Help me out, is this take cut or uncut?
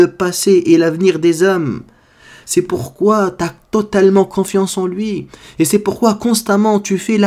uncut